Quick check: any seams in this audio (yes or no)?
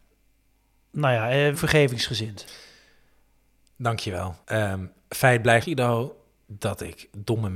yes